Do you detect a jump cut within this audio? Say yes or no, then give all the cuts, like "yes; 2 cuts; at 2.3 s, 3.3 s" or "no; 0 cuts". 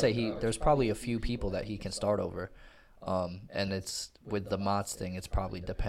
yes; 1 cut; at 3.7 s